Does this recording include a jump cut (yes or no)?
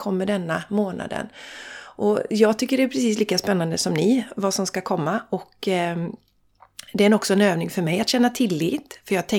no